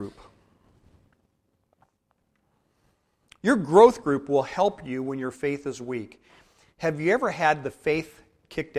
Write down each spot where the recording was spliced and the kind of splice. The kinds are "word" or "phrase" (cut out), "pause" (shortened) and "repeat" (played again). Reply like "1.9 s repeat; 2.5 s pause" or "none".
none

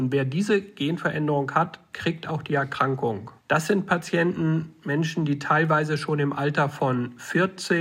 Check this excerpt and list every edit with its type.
3.4 s pause

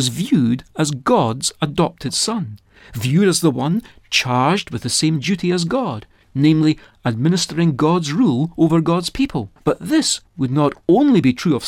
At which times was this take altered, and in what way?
9.6 s pause

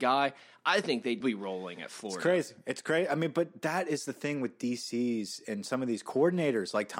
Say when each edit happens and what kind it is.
1.2 s word

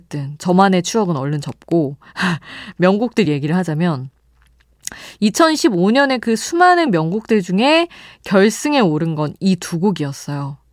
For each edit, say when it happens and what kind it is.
none

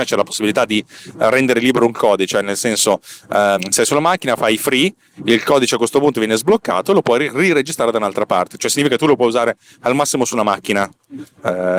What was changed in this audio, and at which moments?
none

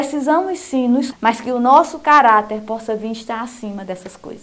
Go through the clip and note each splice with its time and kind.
1.1 s word

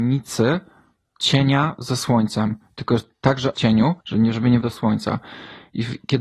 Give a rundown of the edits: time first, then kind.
3.5 s phrase; 4.0 s pause; 4.6 s word

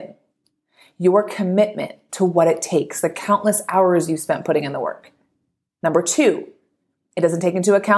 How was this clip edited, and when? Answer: none

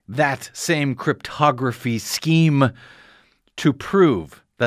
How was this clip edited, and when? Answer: none

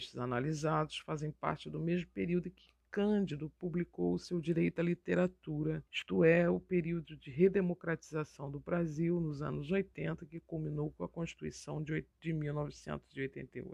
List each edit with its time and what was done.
5.9 s pause; 12.1 s pause

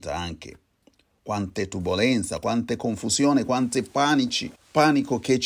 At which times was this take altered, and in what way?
4.6 s pause

